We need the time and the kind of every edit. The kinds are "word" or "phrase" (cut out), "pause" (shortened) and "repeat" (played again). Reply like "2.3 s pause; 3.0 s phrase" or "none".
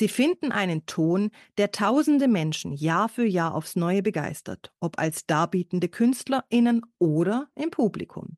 none